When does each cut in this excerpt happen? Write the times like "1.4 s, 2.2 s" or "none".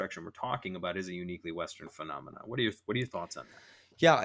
none